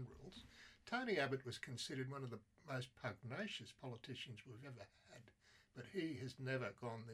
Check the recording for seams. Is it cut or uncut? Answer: uncut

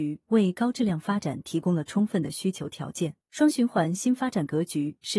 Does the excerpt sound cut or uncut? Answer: cut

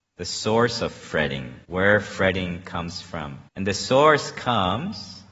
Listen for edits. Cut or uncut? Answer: cut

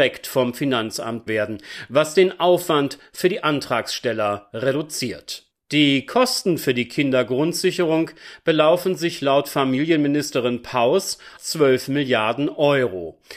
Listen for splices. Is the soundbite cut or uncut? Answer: cut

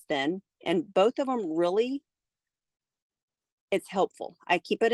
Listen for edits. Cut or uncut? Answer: uncut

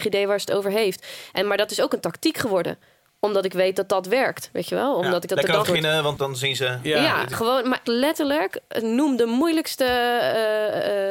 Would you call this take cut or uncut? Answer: cut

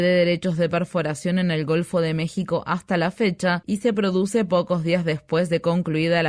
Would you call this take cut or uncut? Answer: uncut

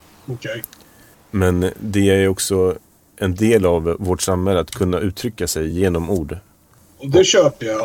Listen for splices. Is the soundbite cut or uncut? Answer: uncut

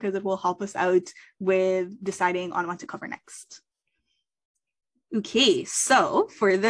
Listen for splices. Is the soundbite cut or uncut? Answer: uncut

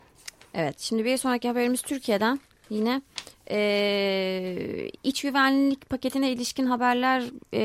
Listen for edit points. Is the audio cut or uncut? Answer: cut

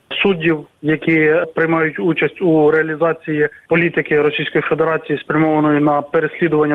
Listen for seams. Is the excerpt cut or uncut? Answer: uncut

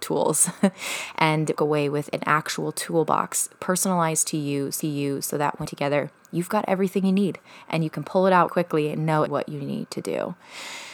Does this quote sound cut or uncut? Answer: cut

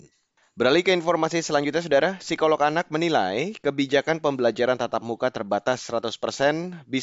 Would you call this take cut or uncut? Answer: uncut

